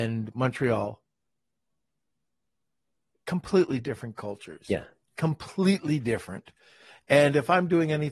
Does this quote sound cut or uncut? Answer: uncut